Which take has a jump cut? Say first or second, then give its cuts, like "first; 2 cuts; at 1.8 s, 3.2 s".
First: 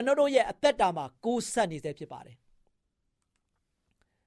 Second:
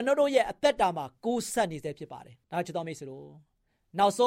second; 1 cut; at 2.4 s